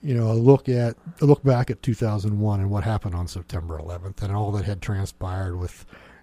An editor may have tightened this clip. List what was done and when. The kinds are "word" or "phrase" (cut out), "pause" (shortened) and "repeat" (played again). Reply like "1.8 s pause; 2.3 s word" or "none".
none